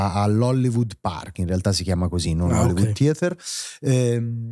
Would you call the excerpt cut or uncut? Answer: uncut